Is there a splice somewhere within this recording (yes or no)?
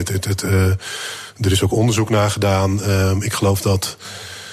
no